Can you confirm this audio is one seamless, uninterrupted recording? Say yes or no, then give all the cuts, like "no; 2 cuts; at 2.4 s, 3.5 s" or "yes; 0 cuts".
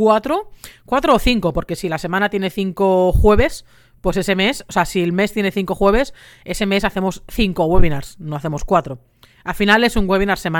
yes; 0 cuts